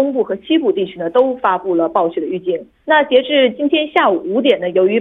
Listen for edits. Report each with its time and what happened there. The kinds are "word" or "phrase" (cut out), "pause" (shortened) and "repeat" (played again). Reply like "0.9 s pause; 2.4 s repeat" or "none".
2.7 s pause